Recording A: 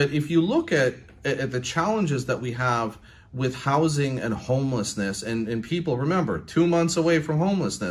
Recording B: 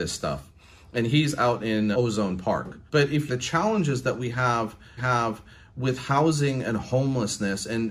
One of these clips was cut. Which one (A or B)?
B